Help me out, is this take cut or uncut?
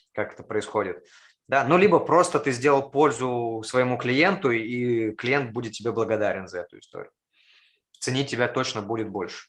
uncut